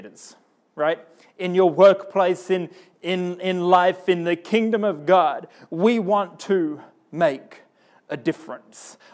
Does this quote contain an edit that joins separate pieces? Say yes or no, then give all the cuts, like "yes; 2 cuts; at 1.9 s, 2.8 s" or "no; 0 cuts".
no; 0 cuts